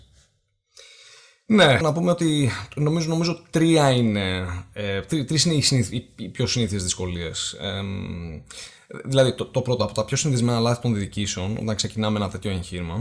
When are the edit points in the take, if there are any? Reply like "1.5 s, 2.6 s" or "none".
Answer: 1.8 s